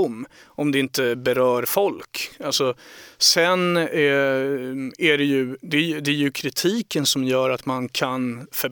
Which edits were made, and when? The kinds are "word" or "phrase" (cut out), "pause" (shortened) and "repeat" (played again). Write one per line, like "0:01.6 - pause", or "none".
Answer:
none